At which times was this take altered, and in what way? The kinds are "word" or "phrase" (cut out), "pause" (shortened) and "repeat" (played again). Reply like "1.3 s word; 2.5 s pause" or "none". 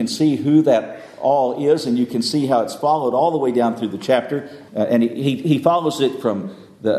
4.7 s pause